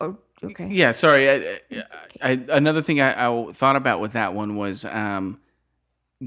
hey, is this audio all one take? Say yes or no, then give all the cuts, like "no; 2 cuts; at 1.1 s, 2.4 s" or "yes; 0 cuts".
yes; 0 cuts